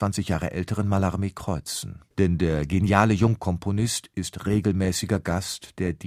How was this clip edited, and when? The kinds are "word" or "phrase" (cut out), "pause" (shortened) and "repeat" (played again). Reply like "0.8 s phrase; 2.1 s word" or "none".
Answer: 2.1 s pause